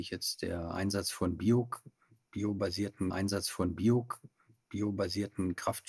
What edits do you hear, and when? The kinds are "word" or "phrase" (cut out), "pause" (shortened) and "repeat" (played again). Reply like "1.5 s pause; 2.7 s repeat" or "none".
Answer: 3.1 s repeat